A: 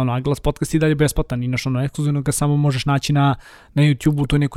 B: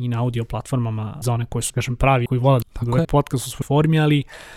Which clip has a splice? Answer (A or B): B